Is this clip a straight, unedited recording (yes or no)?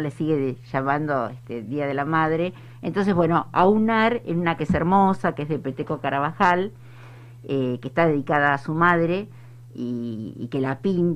no